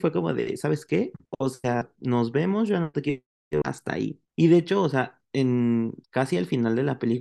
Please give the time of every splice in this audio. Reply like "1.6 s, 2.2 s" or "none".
3.6 s, 6.0 s